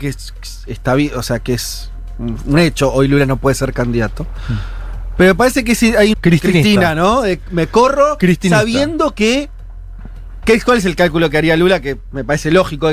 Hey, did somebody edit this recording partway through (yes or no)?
yes